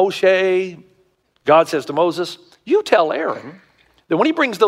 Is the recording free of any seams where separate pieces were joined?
yes; 0 cuts

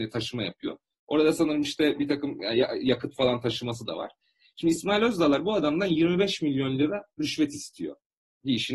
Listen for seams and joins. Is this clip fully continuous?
yes; 0 cuts

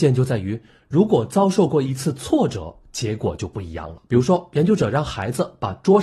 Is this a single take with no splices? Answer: no; 1 cut; at 4.1 s

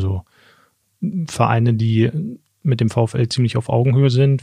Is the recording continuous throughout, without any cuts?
yes; 0 cuts

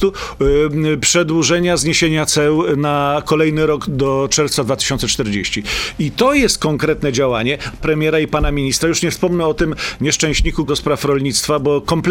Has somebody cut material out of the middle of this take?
yes; 3 cuts; at 3.9 s, 7.8 s, 10.7 s

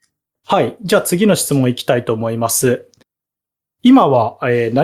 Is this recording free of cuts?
yes; 0 cuts

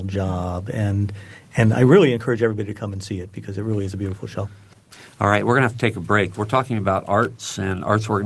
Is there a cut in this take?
no; 0 cuts

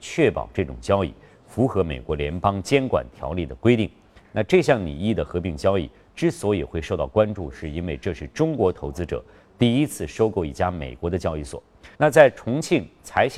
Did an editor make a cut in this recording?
yes; 1 cut; at 11.9 s

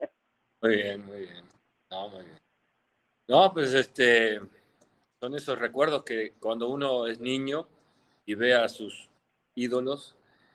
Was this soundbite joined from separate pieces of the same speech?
no; 0 cuts

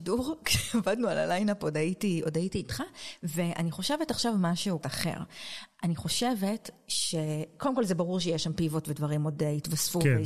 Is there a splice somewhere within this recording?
yes; 1 cut; at 4.8 s

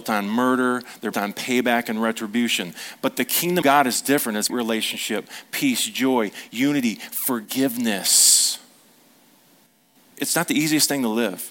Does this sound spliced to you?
yes; 3 cuts; at 1.1 s, 3.6 s, 4.5 s

